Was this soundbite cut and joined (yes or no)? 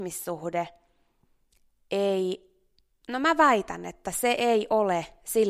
no